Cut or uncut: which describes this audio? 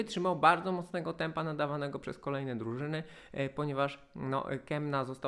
uncut